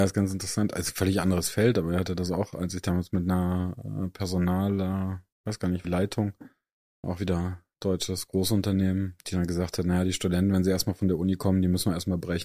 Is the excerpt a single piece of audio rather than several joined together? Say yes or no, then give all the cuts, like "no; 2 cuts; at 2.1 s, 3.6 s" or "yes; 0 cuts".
no; 3 cuts; at 5.3 s, 5.8 s, 7.0 s